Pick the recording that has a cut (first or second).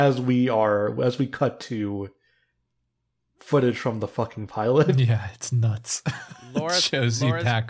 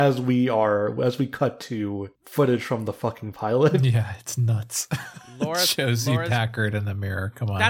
second